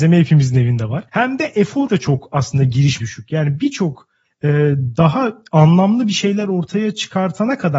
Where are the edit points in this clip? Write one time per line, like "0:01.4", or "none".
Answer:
0:01.1
0:01.9
0:03.0
0:04.2